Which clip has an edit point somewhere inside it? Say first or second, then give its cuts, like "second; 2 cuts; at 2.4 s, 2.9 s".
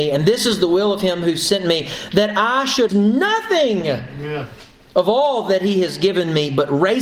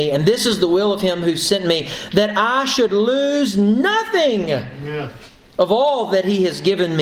first; 1 cut; at 2.9 s